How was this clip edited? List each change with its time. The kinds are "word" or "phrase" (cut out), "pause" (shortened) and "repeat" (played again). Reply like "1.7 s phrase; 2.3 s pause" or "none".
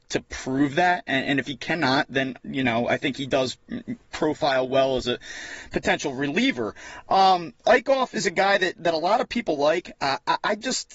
none